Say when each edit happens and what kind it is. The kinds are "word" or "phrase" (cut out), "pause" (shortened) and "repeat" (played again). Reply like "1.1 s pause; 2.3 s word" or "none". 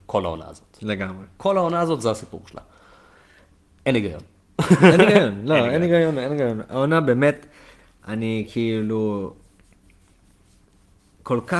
none